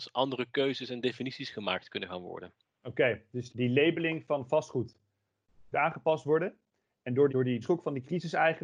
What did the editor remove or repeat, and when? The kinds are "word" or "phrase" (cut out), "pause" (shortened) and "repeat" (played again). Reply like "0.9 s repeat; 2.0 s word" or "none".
3.5 s word; 5.7 s word; 7.3 s word; 7.6 s word